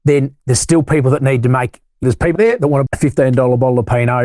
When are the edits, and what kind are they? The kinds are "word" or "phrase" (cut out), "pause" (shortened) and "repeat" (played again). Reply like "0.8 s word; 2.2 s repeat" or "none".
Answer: 2.0 s word; 2.4 s word; 2.9 s word